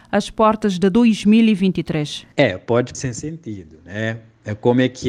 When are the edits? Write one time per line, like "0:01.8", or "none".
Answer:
0:02.3
0:02.9